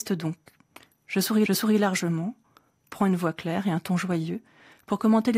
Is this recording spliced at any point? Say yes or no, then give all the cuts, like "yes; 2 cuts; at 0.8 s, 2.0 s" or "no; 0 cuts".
yes; 1 cut; at 1.5 s